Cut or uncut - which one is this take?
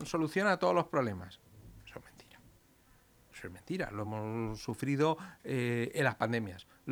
uncut